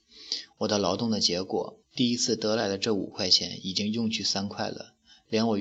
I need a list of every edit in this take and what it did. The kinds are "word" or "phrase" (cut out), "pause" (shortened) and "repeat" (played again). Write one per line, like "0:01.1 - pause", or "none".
0:01.8 - pause